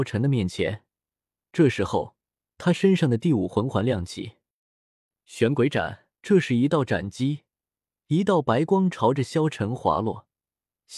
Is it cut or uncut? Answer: cut